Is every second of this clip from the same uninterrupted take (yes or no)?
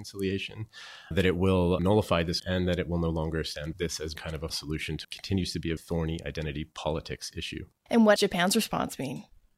no